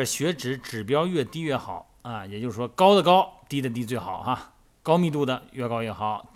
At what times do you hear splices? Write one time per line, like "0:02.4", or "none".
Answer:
none